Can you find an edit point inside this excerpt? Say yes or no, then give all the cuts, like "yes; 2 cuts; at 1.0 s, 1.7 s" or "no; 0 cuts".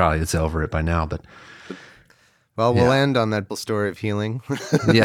yes; 1 cut; at 3.5 s